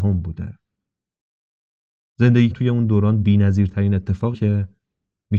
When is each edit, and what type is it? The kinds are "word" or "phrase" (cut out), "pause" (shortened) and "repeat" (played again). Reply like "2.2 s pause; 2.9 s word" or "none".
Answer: 2.5 s word; 4.3 s word